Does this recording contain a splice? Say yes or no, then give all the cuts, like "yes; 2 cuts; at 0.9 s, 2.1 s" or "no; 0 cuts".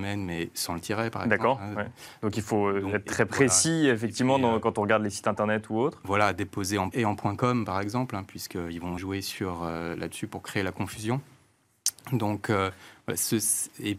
yes; 2 cuts; at 6.9 s, 9.0 s